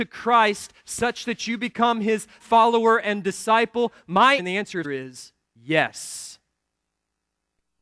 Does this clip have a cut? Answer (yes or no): yes